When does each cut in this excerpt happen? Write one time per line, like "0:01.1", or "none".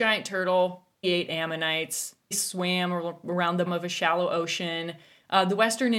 0:01.0
0:02.3
0:03.7